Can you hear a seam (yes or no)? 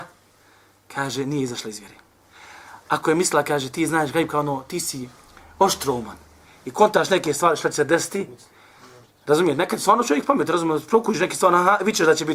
no